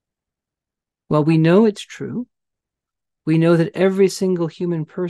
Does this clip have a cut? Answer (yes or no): no